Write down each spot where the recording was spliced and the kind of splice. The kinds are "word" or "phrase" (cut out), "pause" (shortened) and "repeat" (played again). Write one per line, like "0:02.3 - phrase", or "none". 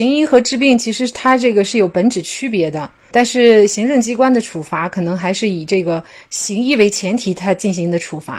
none